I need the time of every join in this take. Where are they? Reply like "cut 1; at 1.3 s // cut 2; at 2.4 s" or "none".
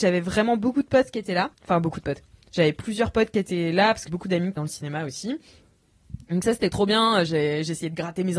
cut 1; at 1.5 s // cut 2; at 4.1 s // cut 3; at 4.6 s